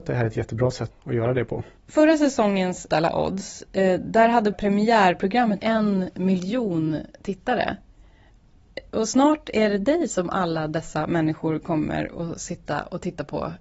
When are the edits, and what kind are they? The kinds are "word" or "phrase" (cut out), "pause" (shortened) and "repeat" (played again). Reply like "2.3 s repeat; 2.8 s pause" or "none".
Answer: 0.9 s word; 1.8 s pause; 2.9 s word; 4.5 s word; 5.6 s word